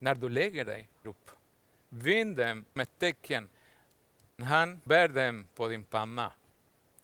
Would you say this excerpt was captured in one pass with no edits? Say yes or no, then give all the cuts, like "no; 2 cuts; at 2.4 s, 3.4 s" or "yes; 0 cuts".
no; 4 cuts; at 1.0 s, 2.8 s, 4.4 s, 4.9 s